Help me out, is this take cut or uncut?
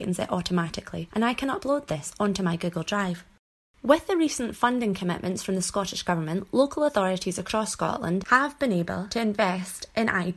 uncut